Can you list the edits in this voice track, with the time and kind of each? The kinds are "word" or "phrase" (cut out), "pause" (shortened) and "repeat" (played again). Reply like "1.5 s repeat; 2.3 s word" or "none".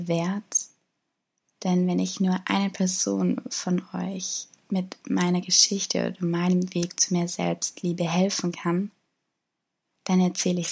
none